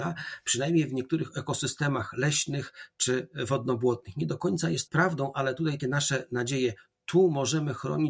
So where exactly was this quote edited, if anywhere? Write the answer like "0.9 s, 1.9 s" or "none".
4.9 s, 5.8 s